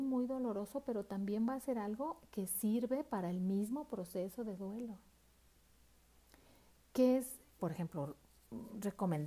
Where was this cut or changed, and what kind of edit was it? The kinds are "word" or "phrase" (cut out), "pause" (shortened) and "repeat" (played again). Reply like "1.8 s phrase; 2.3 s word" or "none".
7.6 s word